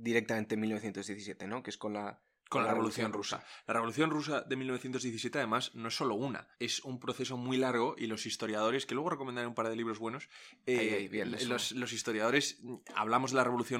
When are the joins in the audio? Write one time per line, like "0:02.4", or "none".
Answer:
0:06.5